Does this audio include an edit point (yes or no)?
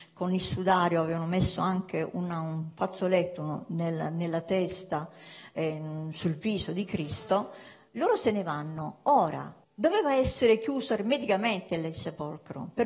yes